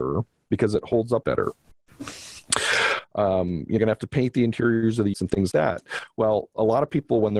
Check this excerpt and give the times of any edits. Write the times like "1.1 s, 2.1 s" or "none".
1.2 s, 3.8 s, 5.1 s, 5.5 s